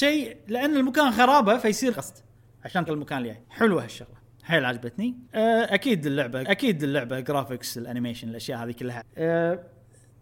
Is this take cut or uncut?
cut